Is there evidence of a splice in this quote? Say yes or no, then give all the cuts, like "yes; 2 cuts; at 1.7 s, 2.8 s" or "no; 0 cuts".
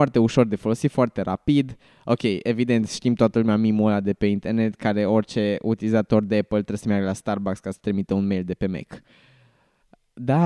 no; 0 cuts